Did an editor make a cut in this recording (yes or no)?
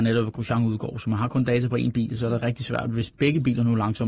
no